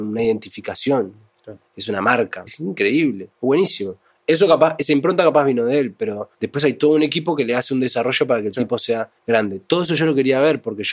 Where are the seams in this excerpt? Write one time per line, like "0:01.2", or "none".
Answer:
0:02.5
0:03.3
0:06.3
0:09.2